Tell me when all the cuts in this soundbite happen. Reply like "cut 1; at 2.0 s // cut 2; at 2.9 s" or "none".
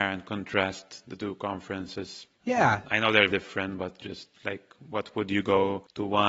cut 1; at 3.3 s